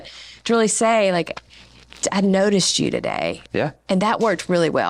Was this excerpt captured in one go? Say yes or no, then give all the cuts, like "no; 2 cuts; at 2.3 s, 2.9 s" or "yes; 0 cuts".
yes; 0 cuts